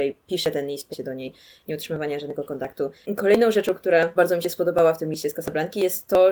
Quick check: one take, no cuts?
no; 2 cuts; at 0.9 s, 4.2 s

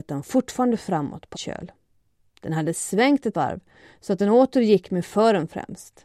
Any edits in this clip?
yes; 2 cuts; at 1.3 s, 3.3 s

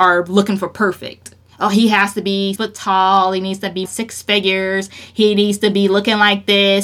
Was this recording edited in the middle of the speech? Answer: yes; 3 cuts; at 1.4 s, 2.6 s, 3.9 s

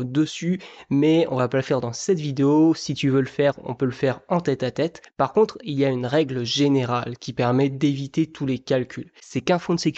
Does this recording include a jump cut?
no; 0 cuts

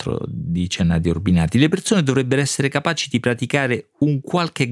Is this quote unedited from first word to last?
yes; 0 cuts

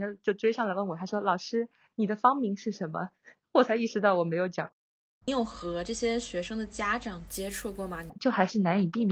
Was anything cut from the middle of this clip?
no; 0 cuts

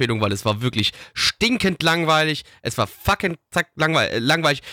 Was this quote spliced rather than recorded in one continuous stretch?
no; 0 cuts

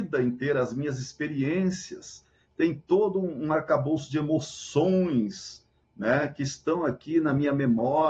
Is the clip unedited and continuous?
yes; 0 cuts

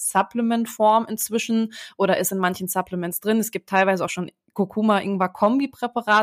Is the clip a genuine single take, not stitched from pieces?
yes; 0 cuts

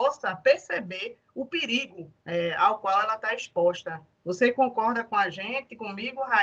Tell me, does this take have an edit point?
yes; 2 cuts; at 2.2 s, 4.1 s

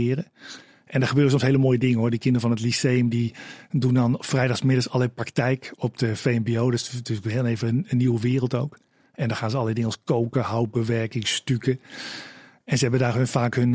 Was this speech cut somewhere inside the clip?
no; 0 cuts

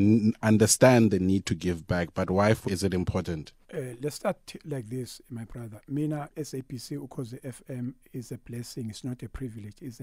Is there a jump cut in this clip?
yes; 3 cuts; at 2.6 s, 3.6 s, 6.3 s

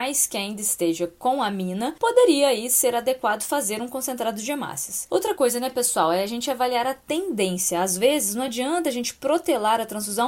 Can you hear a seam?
no; 0 cuts

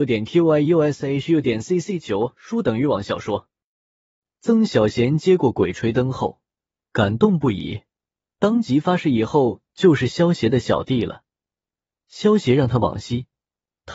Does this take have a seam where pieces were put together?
no; 0 cuts

